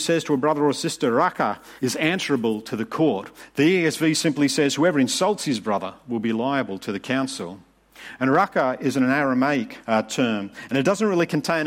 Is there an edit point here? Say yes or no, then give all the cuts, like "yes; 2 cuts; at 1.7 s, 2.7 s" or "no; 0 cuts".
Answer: yes; 2 cuts; at 1.8 s, 9.8 s